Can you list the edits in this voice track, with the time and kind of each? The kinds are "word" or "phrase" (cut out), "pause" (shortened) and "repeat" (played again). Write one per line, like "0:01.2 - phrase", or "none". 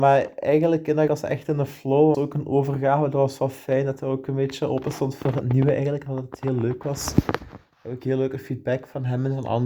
0:01.1 - word
0:02.1 - word